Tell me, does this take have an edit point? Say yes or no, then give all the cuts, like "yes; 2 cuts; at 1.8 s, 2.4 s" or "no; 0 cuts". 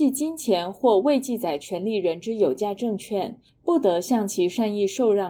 no; 0 cuts